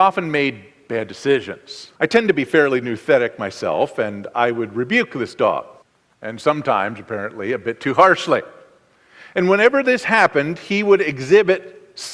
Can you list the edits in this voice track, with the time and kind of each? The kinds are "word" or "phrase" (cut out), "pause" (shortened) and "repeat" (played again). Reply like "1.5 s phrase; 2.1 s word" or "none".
2.0 s pause; 5.8 s pause